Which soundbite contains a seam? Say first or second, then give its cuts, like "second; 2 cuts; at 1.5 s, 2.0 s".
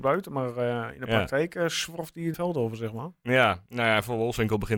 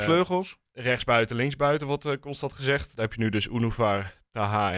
first; 1 cut; at 2.3 s